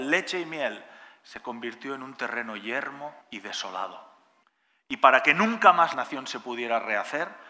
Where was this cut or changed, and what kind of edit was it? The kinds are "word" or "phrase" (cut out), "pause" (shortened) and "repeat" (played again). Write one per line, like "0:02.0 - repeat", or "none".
0:03.2 - pause
0:04.4 - pause
0:05.9 - word

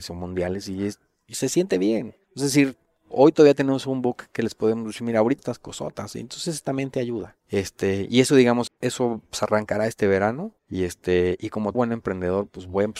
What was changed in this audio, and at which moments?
0:02.2 - pause
0:05.4 - phrase
0:07.4 - pause
0:08.7 - word
0:10.6 - pause
0:11.7 - word

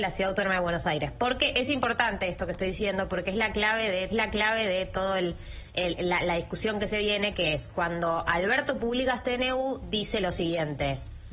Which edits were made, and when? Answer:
0:04.1 - repeat

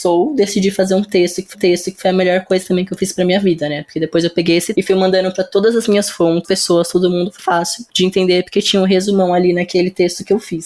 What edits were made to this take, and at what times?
0:01.5 - repeat
0:04.7 - word
0:06.4 - phrase
0:07.4 - word

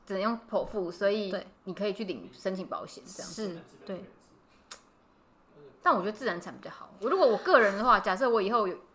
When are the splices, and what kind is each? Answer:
0:01.6 - pause

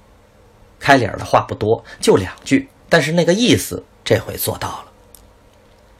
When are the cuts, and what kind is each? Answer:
0:02.8 - pause
0:03.9 - pause

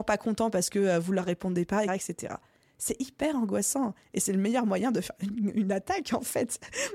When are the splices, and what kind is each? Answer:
0:01.9 - word

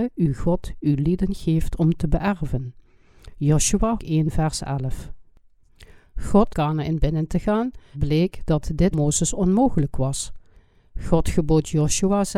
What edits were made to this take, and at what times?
0:04.0 - word
0:06.5 - phrase
0:07.9 - word
0:08.9 - word

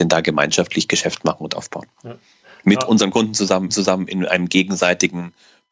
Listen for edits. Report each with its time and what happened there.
0:03.7 - repeat

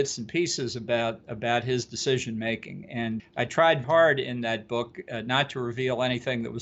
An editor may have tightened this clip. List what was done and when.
0:03.2 - word
0:03.8 - word

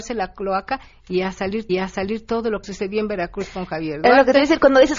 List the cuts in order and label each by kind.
0:01.7 - repeat
0:02.6 - phrase

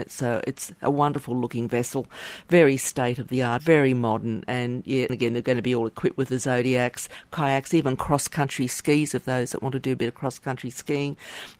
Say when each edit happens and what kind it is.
0:03.6 - phrase
0:05.1 - word

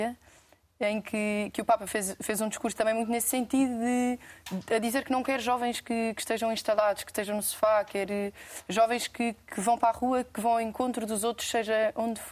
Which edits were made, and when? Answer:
none

